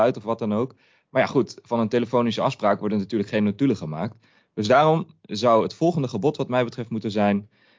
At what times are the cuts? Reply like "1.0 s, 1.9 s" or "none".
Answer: none